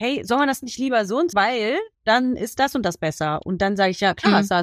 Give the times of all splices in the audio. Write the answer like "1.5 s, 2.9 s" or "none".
1.3 s, 1.9 s